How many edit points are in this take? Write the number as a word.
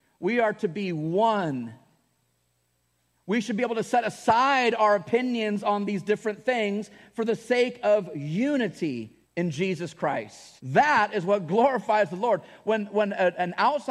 two